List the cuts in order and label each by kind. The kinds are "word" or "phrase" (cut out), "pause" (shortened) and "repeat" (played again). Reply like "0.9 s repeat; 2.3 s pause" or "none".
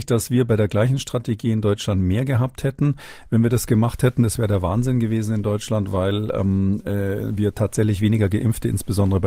none